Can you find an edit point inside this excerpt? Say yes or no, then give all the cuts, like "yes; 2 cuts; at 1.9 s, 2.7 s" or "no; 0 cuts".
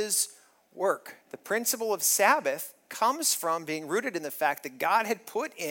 yes; 1 cut; at 1.2 s